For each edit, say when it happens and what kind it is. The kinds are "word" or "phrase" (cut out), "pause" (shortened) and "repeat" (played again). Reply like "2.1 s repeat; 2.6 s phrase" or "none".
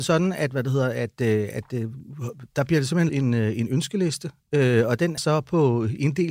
3.1 s word; 5.2 s word